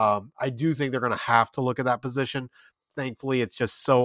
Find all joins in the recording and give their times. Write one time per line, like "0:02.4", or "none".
none